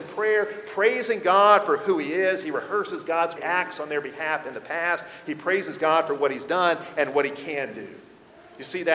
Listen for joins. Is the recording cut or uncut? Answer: cut